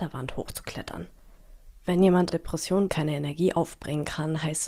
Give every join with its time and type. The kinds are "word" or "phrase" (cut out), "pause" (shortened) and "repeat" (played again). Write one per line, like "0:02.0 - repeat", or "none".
0:01.8 - pause
0:02.3 - phrase
0:02.9 - word